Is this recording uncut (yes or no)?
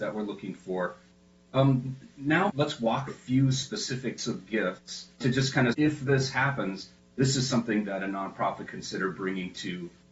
no